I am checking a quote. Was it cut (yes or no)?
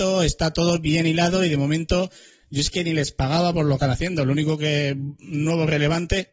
yes